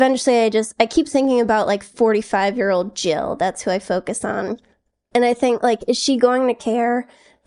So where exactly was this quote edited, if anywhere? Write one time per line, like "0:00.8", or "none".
none